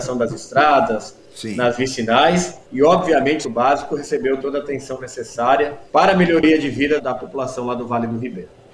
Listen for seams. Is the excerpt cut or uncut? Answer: cut